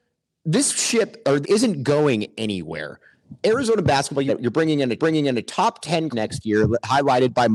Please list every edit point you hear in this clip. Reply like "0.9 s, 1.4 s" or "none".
1.4 s, 4.3 s, 5.0 s, 6.1 s